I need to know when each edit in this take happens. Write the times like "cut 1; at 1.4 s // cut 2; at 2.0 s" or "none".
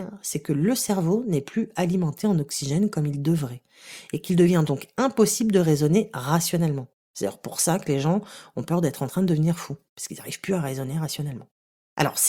none